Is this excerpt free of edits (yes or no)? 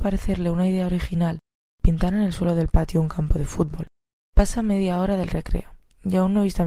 yes